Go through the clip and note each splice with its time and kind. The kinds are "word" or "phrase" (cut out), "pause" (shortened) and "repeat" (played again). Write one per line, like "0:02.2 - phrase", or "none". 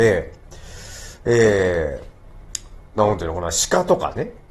0:02.9 - pause